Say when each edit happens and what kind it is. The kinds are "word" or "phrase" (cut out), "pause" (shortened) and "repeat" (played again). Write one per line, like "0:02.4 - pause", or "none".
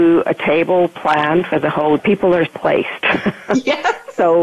0:02.0 - phrase
0:02.5 - word